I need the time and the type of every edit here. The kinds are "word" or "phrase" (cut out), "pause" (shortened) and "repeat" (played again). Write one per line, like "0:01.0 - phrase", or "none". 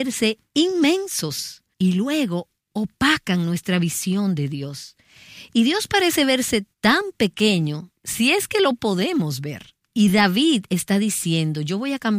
0:01.7 - pause
0:06.7 - pause
0:08.0 - pause
0:09.8 - pause